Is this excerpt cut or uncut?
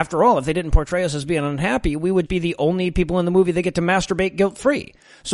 cut